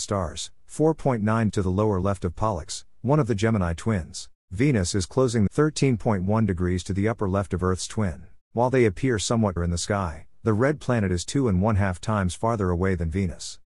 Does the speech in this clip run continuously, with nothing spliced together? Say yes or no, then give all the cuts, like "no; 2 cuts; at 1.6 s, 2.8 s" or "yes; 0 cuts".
no; 5 cuts; at 1.5 s, 4.4 s, 5.5 s, 8.4 s, 9.6 s